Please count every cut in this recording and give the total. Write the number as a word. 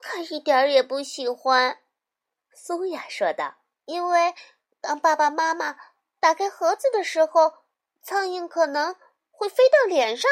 one